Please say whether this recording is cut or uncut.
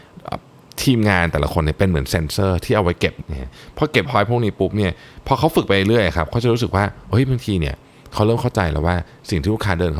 cut